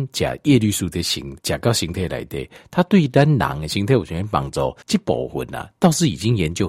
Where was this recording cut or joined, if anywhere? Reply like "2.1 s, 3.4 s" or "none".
1.4 s, 4.8 s